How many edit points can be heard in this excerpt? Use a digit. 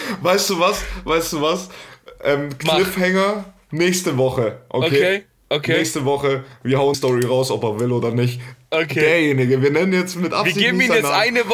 1